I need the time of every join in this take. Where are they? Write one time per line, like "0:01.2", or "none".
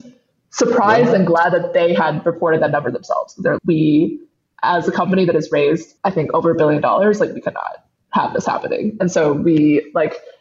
0:03.6
0:06.0
0:08.0